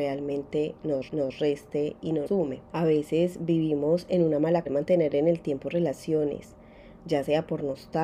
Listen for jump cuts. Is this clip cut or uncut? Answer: cut